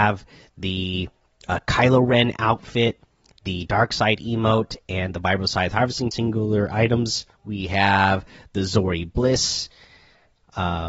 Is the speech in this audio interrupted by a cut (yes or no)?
yes